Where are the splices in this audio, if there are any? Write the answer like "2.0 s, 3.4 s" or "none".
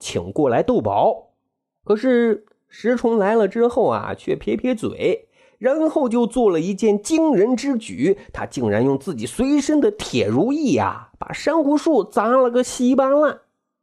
none